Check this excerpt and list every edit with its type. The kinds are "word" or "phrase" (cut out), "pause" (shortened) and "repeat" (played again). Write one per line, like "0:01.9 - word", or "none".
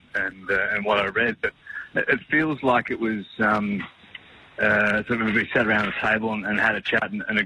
none